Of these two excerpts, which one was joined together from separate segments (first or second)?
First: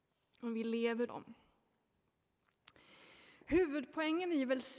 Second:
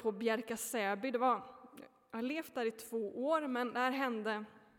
first